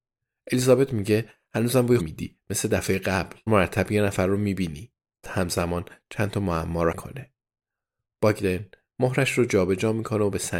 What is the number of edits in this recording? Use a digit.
4